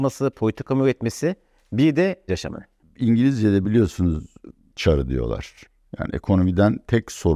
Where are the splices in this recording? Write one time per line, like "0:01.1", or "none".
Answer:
0:02.3
0:04.7